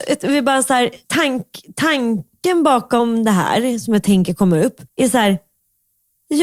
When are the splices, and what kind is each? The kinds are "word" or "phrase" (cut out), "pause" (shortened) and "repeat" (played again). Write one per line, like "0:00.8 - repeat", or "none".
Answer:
0:01.0 - pause
0:04.9 - pause